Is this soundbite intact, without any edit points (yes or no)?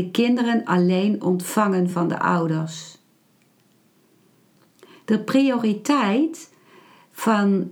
yes